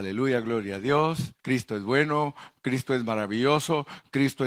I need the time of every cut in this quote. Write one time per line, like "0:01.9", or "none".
0:01.4